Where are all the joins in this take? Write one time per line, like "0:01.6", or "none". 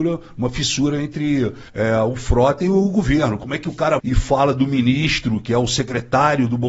0:01.7
0:04.0